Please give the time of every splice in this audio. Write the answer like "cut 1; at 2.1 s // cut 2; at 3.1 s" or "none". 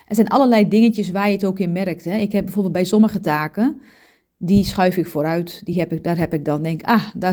none

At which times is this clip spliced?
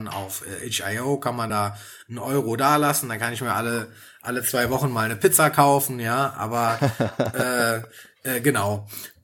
cut 1; at 1.5 s

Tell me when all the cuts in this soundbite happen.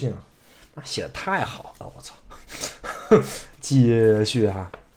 cut 1; at 3.5 s

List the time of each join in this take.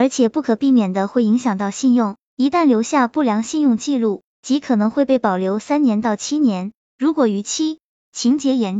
none

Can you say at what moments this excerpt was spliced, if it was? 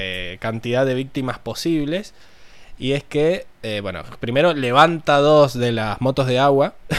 none

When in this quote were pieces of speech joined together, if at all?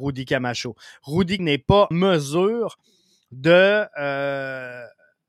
cut 1; at 1.4 s // cut 2; at 1.9 s

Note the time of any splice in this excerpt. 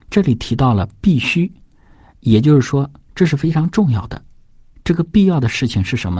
none

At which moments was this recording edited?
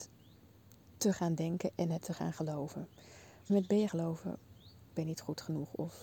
cut 1; at 3.5 s // cut 2; at 3.9 s // cut 3; at 4.9 s

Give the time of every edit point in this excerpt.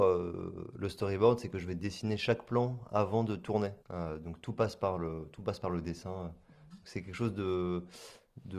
cut 1; at 3.8 s

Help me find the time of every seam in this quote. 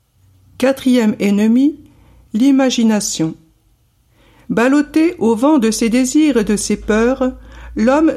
none

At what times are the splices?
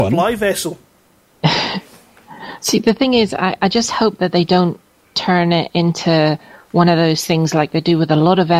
none

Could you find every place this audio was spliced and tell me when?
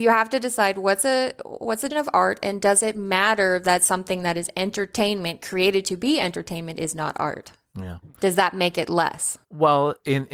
cut 1; at 1.9 s // cut 2; at 9.4 s

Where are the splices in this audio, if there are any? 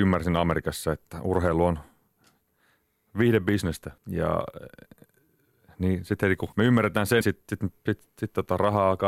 cut 1; at 4.0 s // cut 2; at 6.5 s // cut 3; at 7.2 s

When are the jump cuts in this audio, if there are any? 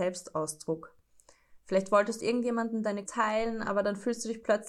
cut 1; at 2.2 s // cut 2; at 3.0 s

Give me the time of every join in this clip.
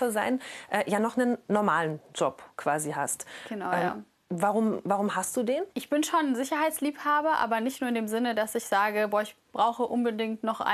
cut 1; at 5.7 s

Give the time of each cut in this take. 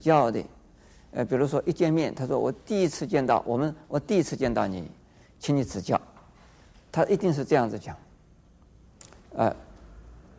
none

